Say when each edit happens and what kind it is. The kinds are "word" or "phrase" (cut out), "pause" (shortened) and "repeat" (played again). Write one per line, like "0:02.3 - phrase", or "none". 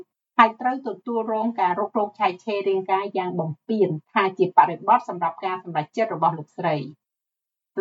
0:04.0 - pause